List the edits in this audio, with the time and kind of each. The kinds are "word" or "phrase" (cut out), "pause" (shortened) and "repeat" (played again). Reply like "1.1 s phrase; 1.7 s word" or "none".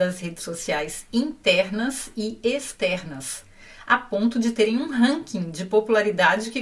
none